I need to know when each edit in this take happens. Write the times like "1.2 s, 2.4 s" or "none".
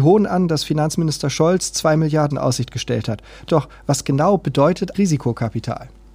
2.3 s, 3.5 s, 4.9 s